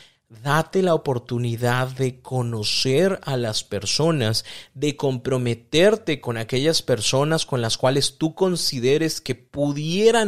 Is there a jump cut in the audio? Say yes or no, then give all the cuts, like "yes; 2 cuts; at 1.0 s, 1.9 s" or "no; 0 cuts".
no; 0 cuts